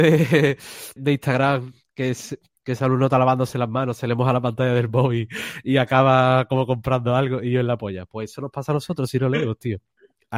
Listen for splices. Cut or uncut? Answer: cut